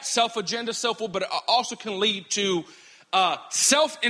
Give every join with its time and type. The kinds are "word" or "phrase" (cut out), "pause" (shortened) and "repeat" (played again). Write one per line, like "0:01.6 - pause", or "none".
none